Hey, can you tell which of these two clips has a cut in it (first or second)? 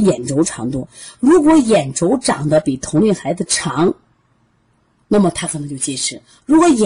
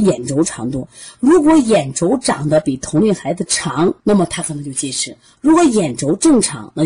second